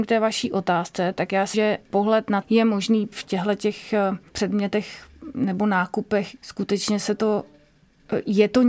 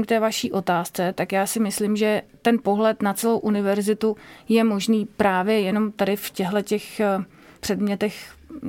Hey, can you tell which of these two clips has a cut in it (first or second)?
first